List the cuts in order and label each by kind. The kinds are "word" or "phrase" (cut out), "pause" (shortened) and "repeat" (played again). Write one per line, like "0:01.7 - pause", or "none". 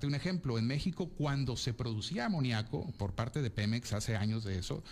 none